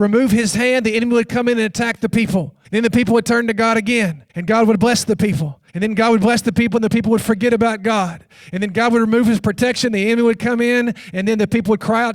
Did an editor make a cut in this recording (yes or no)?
yes